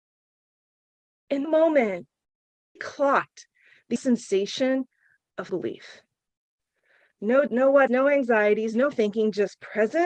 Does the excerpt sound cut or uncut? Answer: cut